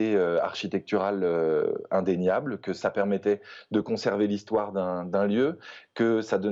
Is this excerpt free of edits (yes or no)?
yes